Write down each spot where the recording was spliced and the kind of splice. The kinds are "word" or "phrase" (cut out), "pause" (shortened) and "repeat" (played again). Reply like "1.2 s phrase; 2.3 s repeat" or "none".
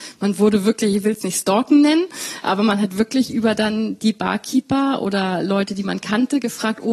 none